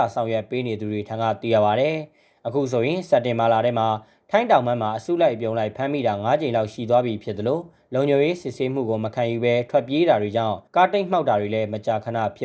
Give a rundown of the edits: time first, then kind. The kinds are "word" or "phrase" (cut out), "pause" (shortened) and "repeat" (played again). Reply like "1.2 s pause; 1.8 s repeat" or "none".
10.7 s pause